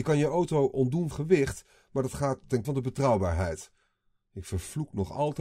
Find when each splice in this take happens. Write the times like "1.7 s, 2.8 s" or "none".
1.1 s, 2.6 s